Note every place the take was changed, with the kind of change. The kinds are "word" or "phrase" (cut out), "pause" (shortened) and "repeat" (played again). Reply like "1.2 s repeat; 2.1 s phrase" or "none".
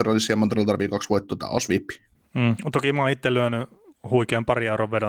none